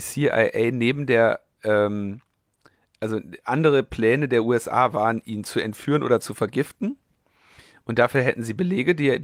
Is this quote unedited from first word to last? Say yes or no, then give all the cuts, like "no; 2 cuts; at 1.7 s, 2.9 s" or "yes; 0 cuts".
yes; 0 cuts